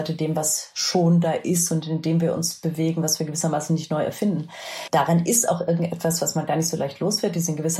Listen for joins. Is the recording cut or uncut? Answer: uncut